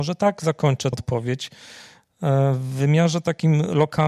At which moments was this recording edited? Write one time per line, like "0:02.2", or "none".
0:00.9